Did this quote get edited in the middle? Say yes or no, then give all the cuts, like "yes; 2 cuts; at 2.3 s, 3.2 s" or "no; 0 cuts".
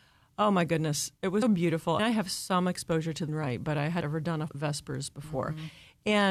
yes; 5 cuts; at 1.4 s, 2.0 s, 3.3 s, 4.0 s, 4.5 s